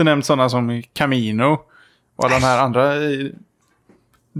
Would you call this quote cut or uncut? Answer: uncut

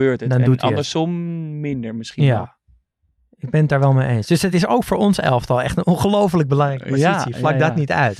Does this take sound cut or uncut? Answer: uncut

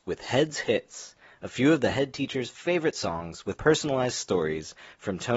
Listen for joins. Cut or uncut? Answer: cut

